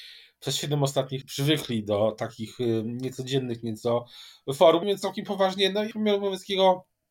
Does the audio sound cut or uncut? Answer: cut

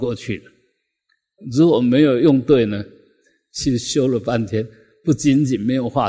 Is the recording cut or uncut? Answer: uncut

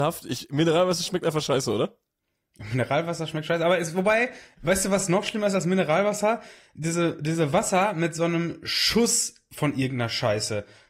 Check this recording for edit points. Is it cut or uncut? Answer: uncut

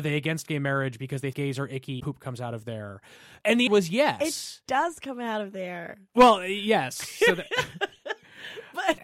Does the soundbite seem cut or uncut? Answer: cut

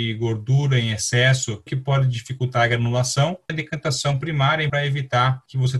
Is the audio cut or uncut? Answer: cut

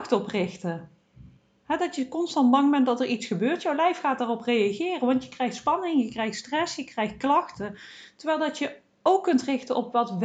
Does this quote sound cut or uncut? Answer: uncut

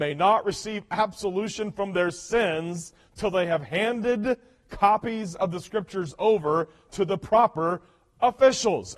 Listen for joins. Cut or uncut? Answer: uncut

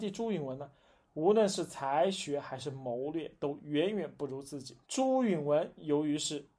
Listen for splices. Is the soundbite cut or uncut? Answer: cut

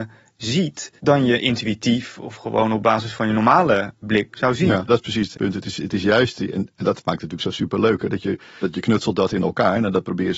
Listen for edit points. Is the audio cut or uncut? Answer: cut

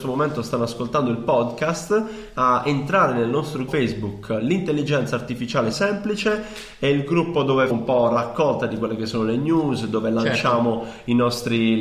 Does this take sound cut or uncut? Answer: cut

